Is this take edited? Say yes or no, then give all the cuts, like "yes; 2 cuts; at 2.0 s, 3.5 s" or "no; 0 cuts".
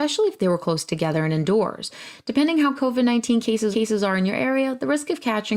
yes; 2 cuts; at 2.8 s, 3.7 s